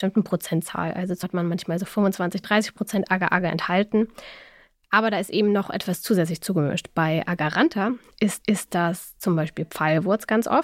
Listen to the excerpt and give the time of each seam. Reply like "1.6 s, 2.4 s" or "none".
1.2 s, 8.4 s